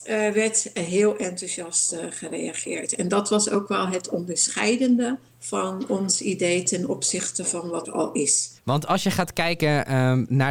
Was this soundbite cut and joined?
yes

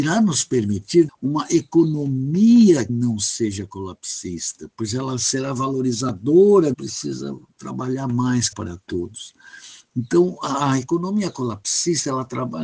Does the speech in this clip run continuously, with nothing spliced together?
no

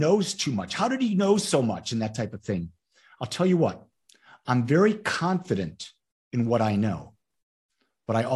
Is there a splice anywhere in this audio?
no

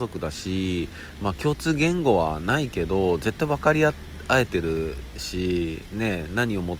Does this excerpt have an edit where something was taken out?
no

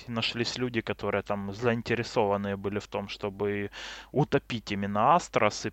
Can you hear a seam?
no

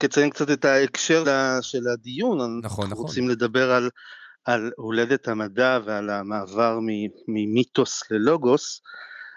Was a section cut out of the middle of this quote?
yes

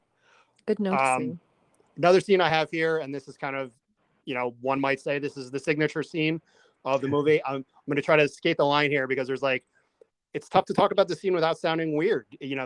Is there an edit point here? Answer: no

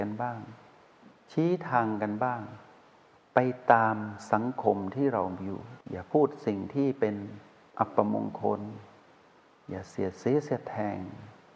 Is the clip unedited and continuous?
no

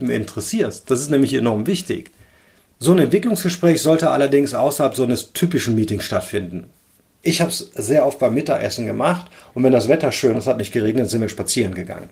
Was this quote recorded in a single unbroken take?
no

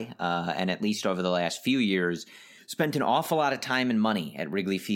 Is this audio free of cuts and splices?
no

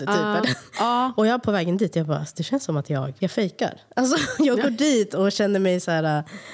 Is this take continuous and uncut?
no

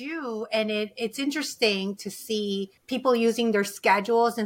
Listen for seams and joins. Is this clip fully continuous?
no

